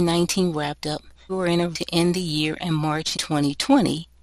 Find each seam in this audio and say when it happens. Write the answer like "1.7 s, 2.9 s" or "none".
1.3 s, 1.7 s, 3.1 s